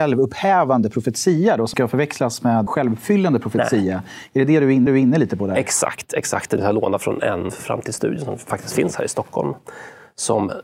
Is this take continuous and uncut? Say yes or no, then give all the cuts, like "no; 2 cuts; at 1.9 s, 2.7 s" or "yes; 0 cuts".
no; 5 cuts; at 1.7 s, 2.7 s, 4.9 s, 6.6 s, 7.5 s